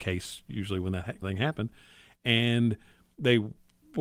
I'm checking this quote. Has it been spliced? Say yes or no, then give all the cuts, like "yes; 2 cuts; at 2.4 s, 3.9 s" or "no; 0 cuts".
yes; 1 cut; at 1.2 s